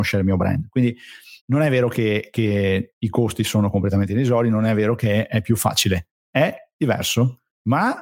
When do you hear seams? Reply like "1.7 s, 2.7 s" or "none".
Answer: 1.4 s